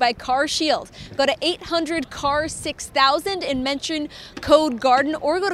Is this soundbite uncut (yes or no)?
yes